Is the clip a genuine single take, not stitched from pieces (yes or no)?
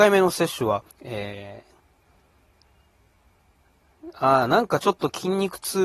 no